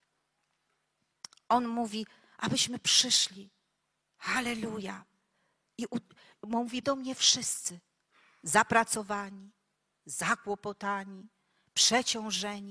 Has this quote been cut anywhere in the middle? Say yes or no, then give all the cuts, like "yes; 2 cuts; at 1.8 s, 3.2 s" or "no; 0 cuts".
yes; 1 cut; at 6.8 s